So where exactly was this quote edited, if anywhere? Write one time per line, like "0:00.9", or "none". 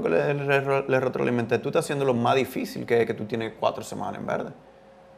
none